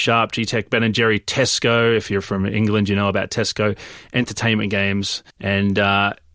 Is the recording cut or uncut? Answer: cut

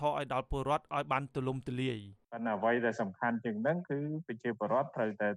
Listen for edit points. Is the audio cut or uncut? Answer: cut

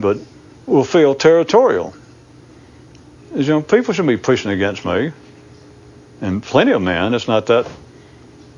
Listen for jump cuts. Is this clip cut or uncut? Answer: uncut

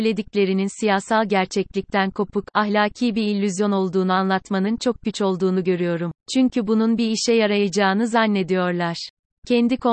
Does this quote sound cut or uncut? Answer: cut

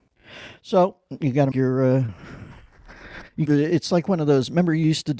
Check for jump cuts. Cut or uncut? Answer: cut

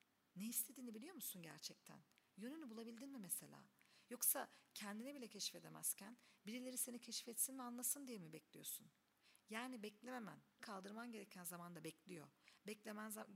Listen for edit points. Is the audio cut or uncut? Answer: cut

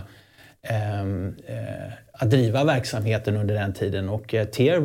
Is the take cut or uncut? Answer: uncut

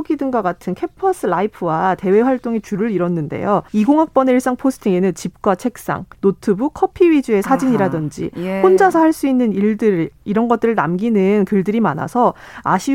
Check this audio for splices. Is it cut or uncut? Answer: cut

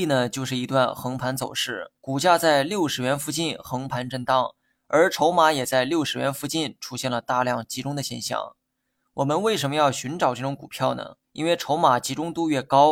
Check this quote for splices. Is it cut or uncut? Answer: cut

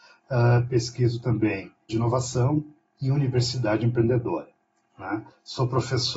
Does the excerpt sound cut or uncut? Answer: cut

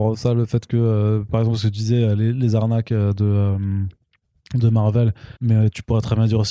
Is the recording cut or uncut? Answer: cut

